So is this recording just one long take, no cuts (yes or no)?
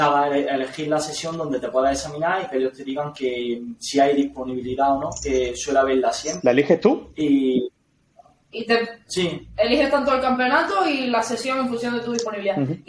yes